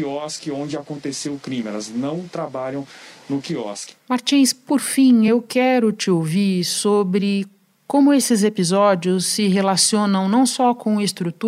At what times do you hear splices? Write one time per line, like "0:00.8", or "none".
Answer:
none